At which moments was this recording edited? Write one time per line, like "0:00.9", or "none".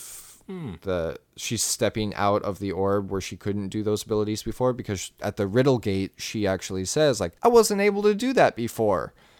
0:07.4